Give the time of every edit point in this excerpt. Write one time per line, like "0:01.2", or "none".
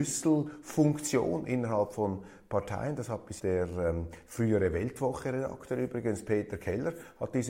0:03.4